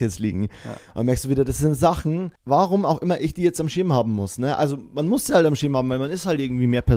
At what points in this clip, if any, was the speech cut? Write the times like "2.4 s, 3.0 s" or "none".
2.4 s